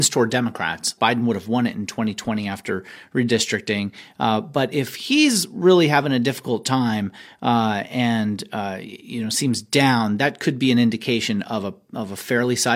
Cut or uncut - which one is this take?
uncut